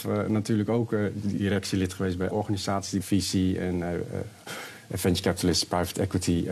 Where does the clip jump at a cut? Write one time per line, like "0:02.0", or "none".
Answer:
0:02.3
0:03.0